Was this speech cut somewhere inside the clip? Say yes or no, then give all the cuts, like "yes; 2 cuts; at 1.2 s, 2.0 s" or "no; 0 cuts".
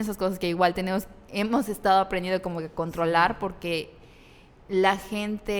no; 0 cuts